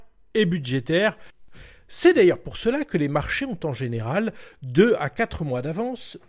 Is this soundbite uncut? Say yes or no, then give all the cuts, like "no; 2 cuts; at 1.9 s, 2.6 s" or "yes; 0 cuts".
yes; 0 cuts